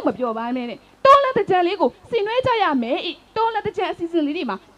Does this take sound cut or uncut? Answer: uncut